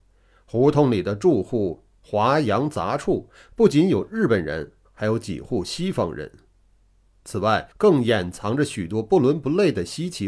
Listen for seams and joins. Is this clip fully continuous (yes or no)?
no